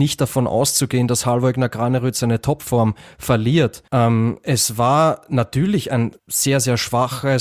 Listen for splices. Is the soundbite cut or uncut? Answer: cut